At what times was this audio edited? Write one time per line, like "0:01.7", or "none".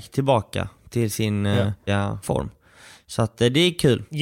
0:01.9

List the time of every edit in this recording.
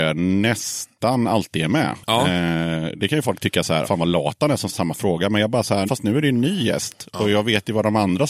0:03.8
0:04.7
0:05.9

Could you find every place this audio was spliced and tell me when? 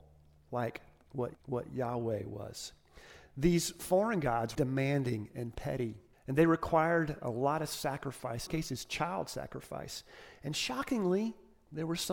0:01.3
0:04.5
0:06.1
0:08.5

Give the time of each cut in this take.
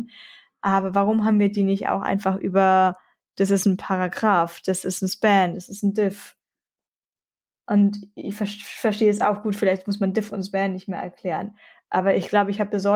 none

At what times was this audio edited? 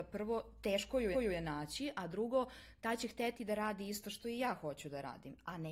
0:01.1

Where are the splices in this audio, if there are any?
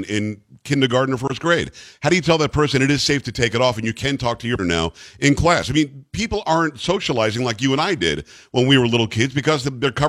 0:04.6

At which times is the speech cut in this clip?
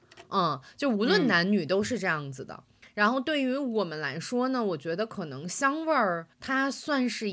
0:06.3

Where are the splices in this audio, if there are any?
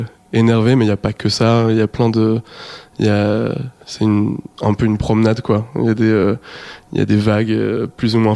none

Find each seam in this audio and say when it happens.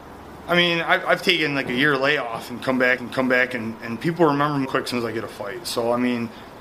0:03.0
0:04.6

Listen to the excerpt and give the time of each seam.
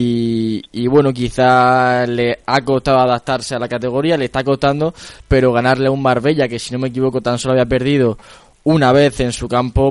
none

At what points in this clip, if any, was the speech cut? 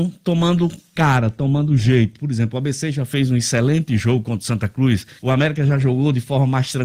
0:05.2

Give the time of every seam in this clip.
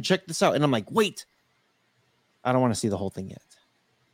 none

